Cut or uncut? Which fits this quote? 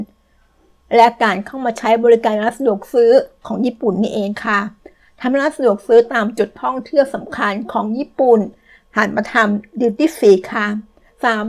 uncut